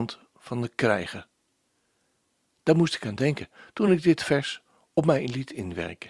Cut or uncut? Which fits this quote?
uncut